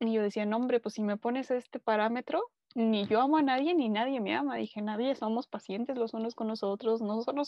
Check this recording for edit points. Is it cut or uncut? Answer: uncut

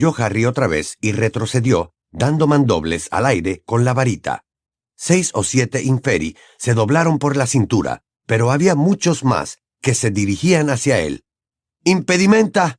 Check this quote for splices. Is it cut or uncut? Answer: uncut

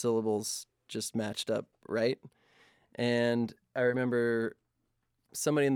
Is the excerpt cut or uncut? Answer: uncut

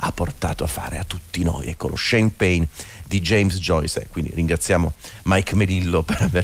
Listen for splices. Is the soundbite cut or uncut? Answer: uncut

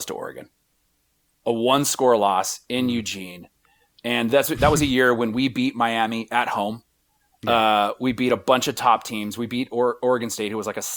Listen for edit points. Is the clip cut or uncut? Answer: uncut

